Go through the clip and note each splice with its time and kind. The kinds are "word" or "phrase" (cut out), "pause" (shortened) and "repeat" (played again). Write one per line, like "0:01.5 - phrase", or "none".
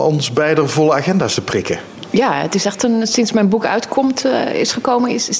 none